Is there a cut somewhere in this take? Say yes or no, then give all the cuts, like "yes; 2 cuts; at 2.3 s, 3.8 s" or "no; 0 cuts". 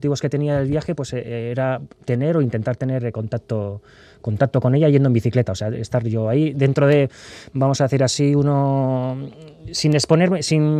no; 0 cuts